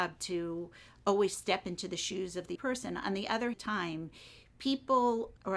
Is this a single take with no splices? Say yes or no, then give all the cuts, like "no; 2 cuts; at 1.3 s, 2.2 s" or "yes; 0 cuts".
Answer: no; 2 cuts; at 2.5 s, 3.5 s